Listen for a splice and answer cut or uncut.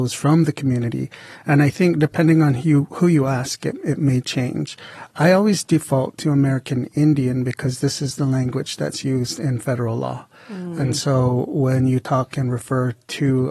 uncut